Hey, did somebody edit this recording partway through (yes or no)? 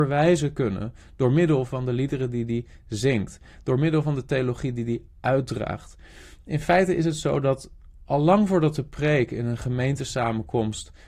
no